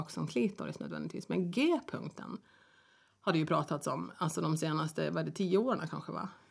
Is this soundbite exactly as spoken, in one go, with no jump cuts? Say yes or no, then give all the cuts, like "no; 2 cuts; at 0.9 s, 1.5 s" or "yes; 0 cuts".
yes; 0 cuts